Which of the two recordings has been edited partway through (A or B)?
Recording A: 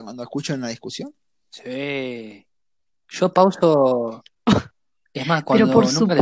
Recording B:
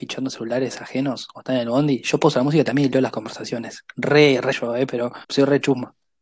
B